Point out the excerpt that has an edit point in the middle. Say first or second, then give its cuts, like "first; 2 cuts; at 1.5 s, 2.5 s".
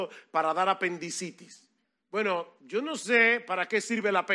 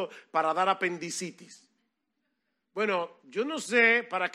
first; 1 cut; at 1.8 s